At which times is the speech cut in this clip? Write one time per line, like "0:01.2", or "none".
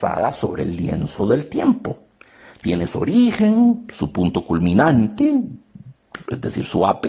none